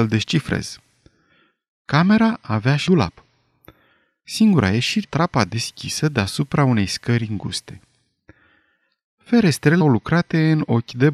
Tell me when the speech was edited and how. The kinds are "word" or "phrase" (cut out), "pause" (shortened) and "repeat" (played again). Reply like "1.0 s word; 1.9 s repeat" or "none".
2.9 s word; 5.0 s word; 9.8 s word